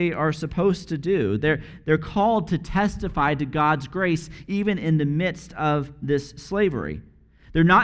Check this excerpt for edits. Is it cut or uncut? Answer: uncut